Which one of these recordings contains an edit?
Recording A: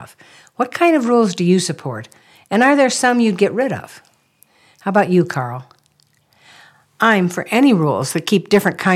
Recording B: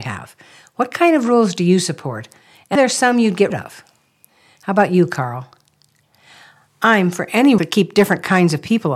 B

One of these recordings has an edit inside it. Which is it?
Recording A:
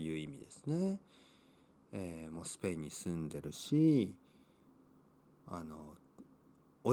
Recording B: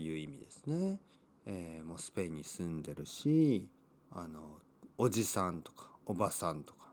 B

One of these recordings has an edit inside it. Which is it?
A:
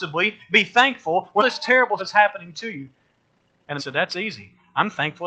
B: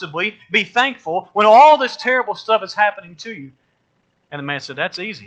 A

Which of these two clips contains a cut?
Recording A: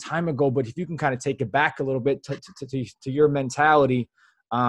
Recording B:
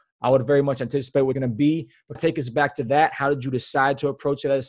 B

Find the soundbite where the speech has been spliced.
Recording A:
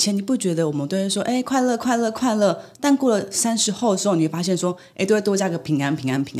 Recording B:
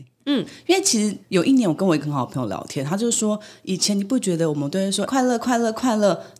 B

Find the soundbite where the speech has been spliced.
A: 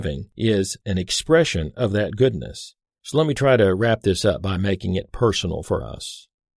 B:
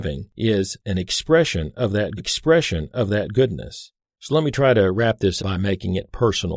B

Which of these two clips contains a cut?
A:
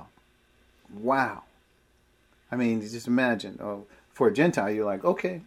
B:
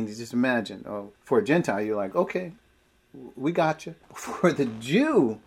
B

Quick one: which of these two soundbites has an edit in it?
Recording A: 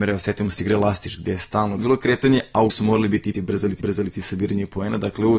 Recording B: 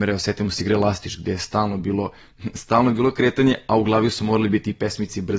A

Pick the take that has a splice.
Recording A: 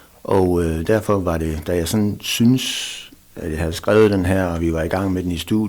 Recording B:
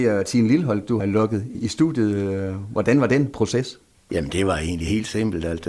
B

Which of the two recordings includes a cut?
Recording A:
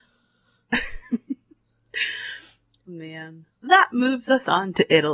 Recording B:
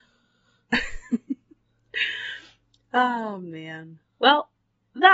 A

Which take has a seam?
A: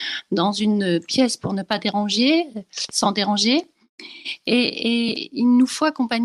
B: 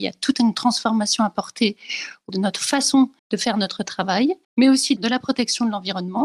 B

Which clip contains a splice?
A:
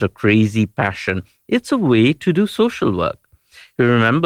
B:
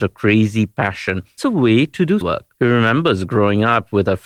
B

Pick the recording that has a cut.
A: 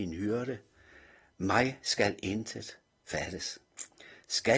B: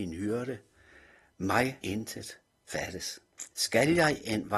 B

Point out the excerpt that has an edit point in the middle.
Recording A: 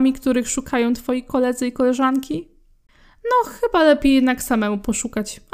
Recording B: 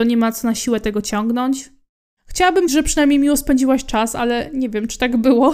B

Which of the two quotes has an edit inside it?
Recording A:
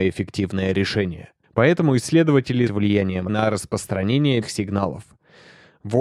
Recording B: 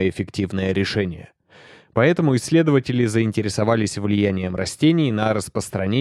A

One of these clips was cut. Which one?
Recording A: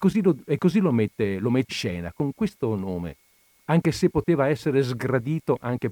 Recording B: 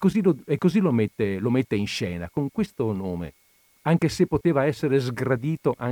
A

